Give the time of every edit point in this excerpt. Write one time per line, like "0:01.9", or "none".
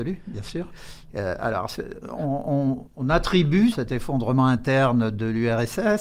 0:02.9
0:03.7